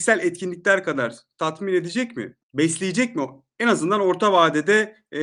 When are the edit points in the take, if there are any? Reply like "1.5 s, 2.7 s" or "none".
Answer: 2.4 s